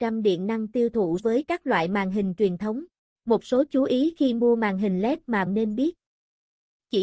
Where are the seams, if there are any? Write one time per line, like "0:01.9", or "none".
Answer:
0:01.2
0:03.0
0:05.5